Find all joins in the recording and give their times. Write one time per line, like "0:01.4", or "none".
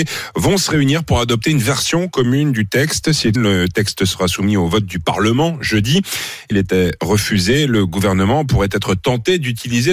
0:03.4
0:06.5